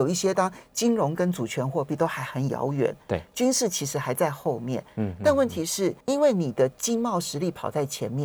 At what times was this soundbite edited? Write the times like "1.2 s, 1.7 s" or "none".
6.0 s